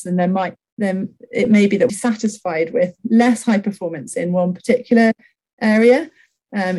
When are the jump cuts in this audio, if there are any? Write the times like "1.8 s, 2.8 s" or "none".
1.9 s